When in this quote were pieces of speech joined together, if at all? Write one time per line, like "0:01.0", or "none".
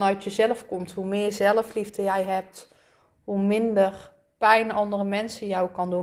none